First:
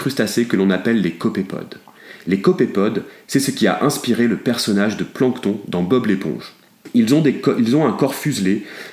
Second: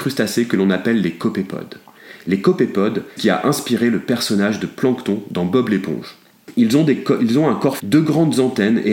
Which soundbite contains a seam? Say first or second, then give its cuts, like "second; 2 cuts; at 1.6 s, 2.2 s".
second; 2 cuts; at 3.2 s, 7.8 s